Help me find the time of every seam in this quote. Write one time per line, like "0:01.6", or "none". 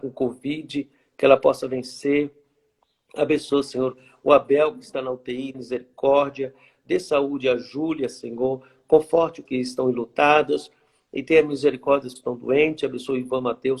0:05.5
0:09.5
0:12.2